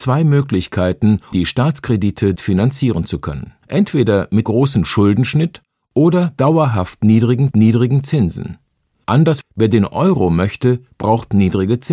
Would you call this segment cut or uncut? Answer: cut